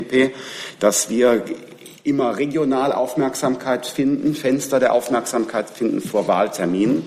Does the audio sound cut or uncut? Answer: uncut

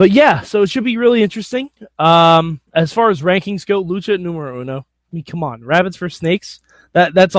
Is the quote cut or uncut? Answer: cut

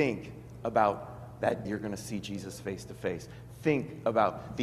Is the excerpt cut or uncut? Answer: cut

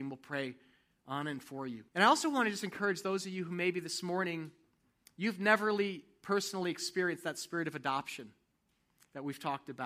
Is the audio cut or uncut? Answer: cut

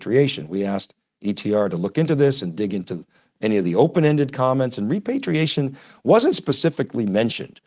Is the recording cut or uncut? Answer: uncut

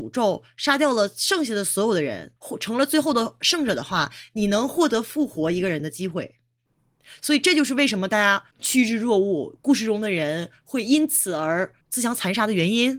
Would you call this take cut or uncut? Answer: cut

